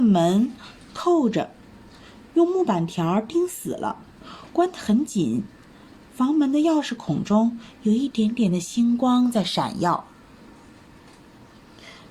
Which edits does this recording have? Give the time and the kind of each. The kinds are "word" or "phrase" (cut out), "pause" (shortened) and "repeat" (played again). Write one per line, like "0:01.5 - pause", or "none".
none